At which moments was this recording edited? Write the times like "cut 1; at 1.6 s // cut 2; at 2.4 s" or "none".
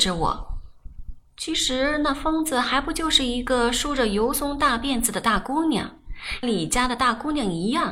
cut 1; at 6.4 s